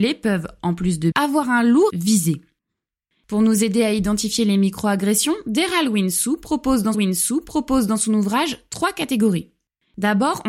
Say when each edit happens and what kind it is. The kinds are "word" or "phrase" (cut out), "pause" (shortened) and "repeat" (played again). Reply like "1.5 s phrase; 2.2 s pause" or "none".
1.1 s word; 1.9 s phrase; 6.9 s repeat